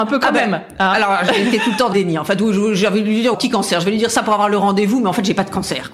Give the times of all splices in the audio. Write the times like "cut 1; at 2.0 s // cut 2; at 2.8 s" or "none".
cut 1; at 1.9 s // cut 2; at 3.3 s